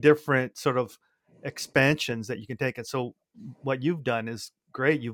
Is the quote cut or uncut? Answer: uncut